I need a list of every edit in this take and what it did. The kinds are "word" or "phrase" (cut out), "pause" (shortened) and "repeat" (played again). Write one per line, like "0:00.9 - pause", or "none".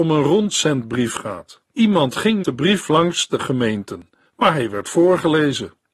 0:01.7 - pause
0:02.4 - word
0:03.4 - word
0:04.2 - pause